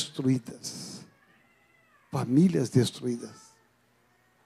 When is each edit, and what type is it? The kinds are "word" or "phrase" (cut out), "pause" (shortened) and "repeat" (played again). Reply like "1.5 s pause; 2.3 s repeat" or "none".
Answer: none